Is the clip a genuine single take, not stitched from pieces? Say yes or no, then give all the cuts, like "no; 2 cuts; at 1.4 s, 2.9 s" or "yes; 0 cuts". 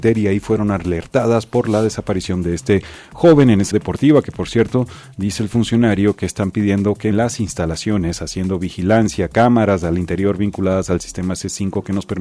no; 2 cuts; at 3.7 s, 7.1 s